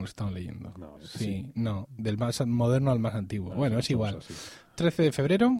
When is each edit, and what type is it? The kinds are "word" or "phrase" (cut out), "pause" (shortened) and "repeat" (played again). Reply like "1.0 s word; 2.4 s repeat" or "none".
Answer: 1.0 s pause